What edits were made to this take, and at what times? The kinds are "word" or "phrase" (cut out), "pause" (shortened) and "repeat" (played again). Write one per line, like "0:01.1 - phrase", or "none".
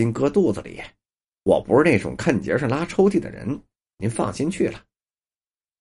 none